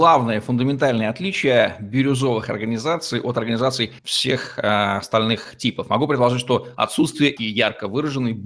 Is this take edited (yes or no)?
yes